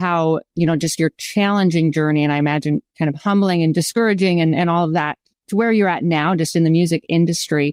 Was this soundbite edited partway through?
no; 0 cuts

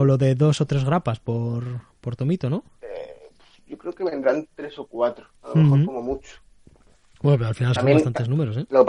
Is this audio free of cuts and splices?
no; 2 cuts; at 5.4 s, 7.8 s

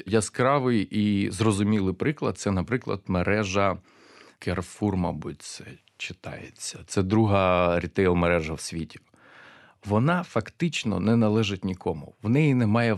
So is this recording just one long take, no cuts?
yes; 0 cuts

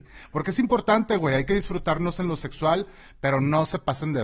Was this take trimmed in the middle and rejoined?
no; 0 cuts

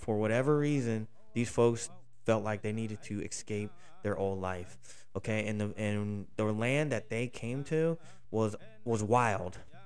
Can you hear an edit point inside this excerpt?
no; 0 cuts

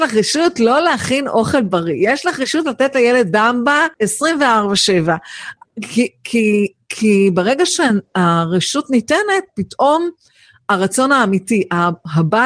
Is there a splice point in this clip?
yes; 1 cut; at 3.9 s

